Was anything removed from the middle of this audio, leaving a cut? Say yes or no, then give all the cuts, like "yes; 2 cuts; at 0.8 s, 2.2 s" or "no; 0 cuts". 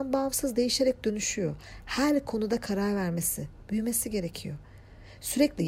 no; 0 cuts